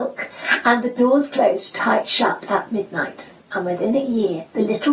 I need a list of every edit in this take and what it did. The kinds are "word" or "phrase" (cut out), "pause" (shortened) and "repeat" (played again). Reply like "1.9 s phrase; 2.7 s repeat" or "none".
3.4 s pause